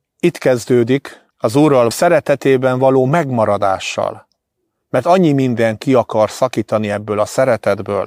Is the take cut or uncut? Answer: cut